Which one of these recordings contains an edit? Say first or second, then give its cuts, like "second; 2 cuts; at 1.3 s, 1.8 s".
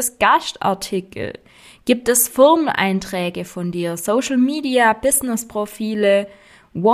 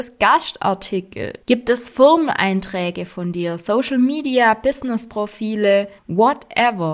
second; 2 cuts; at 1.4 s, 6.0 s